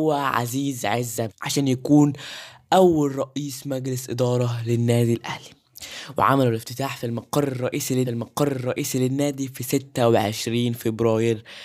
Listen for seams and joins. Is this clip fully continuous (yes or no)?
no